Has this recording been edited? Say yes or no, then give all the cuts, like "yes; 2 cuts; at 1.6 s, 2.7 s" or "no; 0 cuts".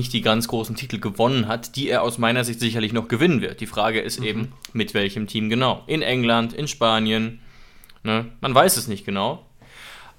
no; 0 cuts